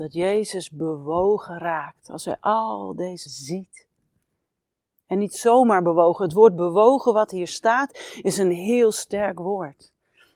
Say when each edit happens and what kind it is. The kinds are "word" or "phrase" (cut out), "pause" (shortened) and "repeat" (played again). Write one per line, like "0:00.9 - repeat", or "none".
0:03.3 - word